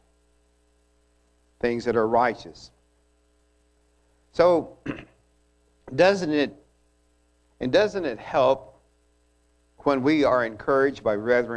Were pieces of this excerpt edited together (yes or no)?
no